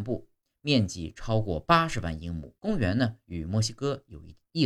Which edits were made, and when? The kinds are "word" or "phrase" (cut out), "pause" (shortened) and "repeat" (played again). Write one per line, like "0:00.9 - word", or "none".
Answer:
0:02.6 - pause

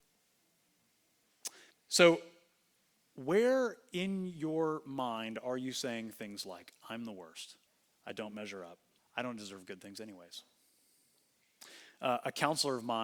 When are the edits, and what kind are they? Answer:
0:01.7 - pause
0:07.7 - pause
0:09.0 - pause

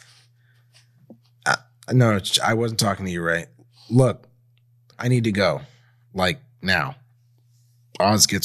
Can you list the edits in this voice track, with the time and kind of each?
0:04.9 - word

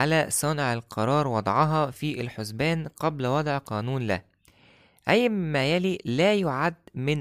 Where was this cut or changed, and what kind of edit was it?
none

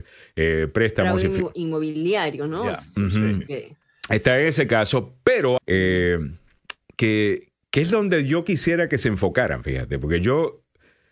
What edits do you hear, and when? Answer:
0:05.6 - phrase

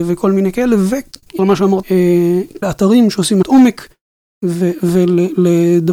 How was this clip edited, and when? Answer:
0:01.4 - word
0:01.8 - word
0:02.6 - word
0:03.4 - word

